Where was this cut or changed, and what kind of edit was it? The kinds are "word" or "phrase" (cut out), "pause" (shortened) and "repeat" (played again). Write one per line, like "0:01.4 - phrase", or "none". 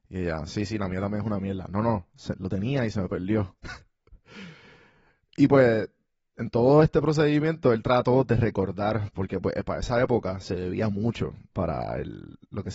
none

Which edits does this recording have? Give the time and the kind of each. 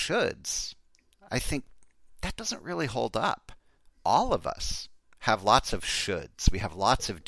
none

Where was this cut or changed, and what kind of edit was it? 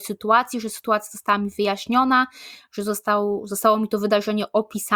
none

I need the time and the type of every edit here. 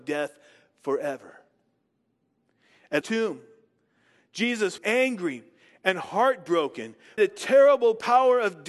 0:03.0 - word
0:04.8 - word
0:07.2 - word

